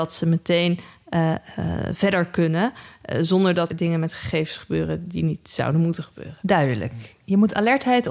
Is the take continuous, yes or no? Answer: no